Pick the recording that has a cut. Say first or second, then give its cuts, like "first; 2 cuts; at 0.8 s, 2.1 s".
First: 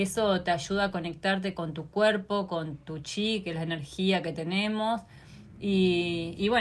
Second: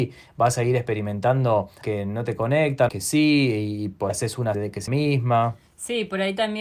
second; 5 cuts; at 1.8 s, 2.9 s, 4.1 s, 4.5 s, 4.9 s